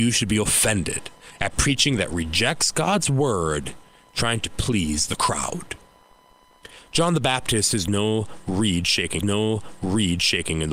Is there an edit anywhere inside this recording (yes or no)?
yes